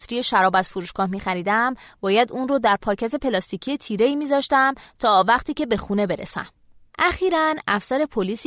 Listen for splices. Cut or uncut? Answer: uncut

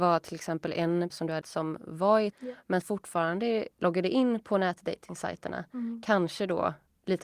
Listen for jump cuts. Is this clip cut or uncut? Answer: cut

